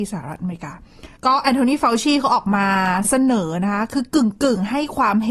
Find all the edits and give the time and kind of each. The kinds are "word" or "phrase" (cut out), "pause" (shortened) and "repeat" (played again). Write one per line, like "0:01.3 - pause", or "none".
0:01.2 - pause